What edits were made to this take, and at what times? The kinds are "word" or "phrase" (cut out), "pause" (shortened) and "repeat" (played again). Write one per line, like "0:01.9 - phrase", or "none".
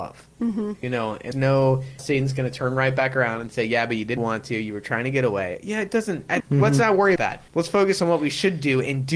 0:01.3 - word
0:02.0 - word
0:04.2 - word
0:06.4 - word
0:07.2 - word
0:07.5 - pause